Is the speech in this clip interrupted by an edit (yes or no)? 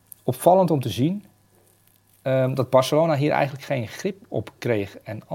no